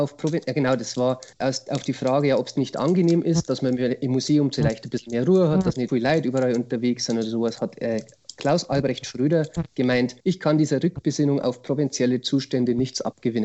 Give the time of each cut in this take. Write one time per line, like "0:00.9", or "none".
0:01.3
0:05.9
0:10.2